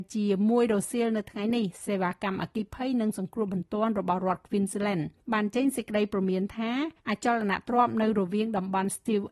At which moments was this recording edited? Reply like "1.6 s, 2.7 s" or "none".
5.2 s, 7.0 s